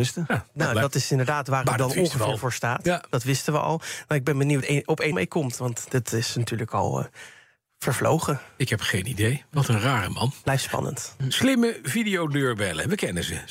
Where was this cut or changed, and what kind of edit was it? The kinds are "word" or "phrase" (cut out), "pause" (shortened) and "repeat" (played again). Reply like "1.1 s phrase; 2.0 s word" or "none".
4.6 s phrase; 5.1 s word

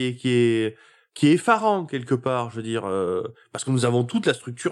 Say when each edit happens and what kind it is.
none

